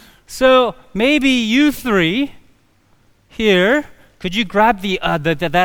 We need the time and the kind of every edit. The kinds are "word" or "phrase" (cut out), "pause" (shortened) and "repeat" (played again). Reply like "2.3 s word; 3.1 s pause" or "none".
none